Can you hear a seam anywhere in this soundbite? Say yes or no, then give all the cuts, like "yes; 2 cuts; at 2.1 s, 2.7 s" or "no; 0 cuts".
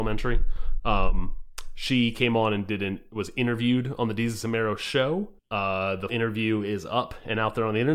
yes; 2 cuts; at 5.4 s, 6.1 s